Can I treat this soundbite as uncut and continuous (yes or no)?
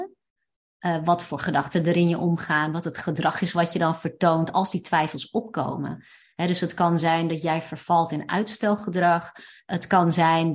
yes